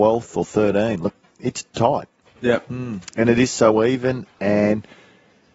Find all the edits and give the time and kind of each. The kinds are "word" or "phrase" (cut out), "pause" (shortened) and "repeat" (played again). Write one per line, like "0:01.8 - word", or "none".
0:01.7 - pause